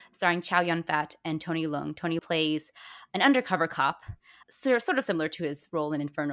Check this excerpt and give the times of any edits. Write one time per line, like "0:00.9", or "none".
0:02.2
0:04.4